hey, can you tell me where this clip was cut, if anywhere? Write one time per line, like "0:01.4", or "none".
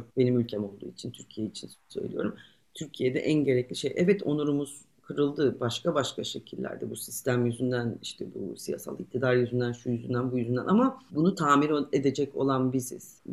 none